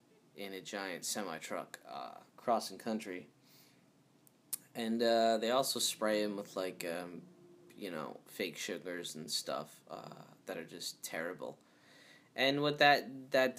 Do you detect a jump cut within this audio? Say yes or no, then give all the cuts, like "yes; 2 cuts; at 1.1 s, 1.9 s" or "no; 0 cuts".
yes; 2 cuts; at 2.3 s, 8.2 s